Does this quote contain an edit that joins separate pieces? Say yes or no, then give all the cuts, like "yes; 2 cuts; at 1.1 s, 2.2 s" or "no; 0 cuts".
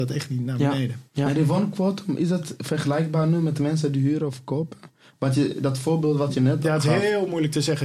no; 0 cuts